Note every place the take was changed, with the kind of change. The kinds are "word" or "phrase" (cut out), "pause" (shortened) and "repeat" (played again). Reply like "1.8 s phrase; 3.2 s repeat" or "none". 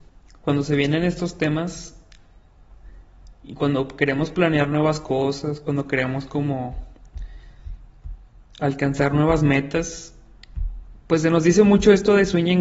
none